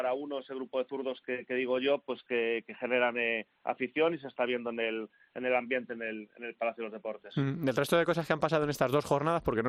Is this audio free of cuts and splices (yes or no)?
yes